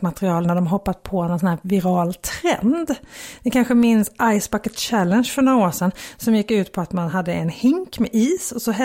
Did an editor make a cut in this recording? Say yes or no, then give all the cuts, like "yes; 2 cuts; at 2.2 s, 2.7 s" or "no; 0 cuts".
no; 0 cuts